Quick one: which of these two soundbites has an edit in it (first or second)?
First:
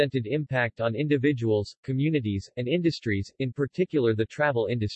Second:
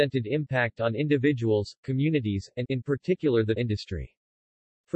second